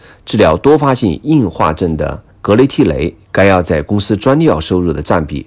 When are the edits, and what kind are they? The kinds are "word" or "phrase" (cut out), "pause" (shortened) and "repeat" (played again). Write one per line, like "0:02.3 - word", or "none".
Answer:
0:02.3 - pause